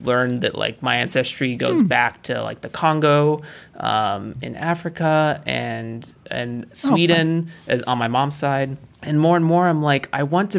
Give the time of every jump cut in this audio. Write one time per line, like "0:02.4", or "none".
0:08.9